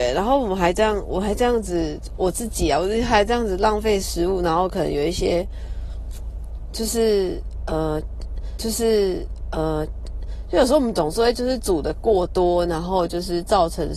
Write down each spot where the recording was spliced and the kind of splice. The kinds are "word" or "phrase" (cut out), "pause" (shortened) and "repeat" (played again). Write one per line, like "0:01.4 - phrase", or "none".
0:08.6 - repeat